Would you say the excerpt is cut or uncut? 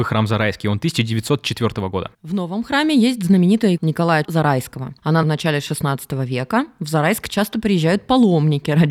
cut